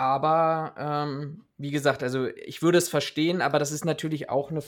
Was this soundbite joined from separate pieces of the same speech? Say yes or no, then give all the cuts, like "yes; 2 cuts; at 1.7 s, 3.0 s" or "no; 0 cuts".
no; 0 cuts